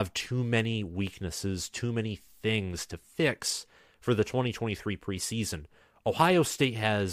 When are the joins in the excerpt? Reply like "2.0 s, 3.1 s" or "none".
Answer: none